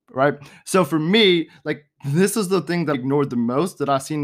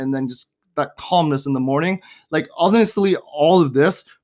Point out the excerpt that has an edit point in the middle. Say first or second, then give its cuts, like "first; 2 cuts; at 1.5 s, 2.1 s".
first; 1 cut; at 2.9 s